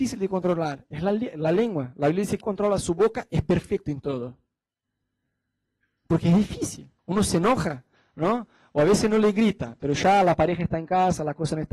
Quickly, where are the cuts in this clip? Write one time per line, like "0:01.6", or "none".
0:02.4
0:07.0